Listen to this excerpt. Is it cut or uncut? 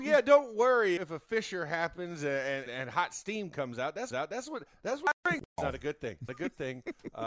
cut